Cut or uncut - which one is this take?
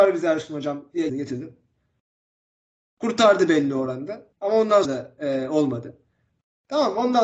cut